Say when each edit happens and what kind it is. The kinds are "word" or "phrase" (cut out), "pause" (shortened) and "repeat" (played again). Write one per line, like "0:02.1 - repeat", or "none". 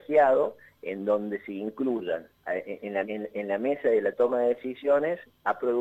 0:02.4 - pause
0:03.0 - word